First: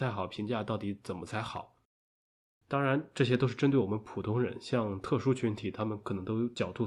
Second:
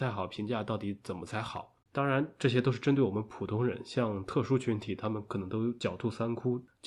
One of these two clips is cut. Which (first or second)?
second